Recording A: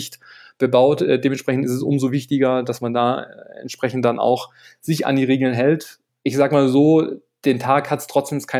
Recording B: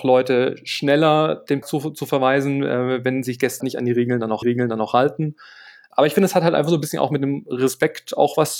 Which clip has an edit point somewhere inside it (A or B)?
B